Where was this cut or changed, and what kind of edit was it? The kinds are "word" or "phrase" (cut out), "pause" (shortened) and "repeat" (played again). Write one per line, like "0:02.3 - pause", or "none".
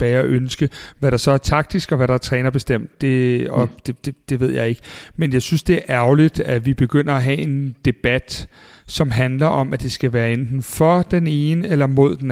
none